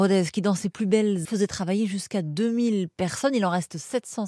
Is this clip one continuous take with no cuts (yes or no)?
no